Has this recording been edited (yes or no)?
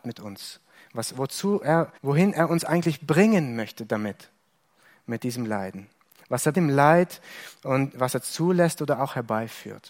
yes